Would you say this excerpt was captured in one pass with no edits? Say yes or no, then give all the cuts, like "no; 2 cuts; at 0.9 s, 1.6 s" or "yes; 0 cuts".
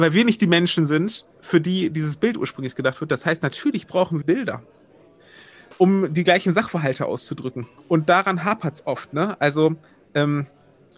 no; 3 cuts; at 1.3 s, 4.2 s, 7.8 s